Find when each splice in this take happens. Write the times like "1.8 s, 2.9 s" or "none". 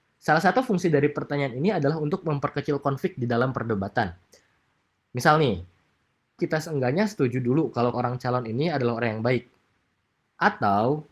6.4 s, 7.9 s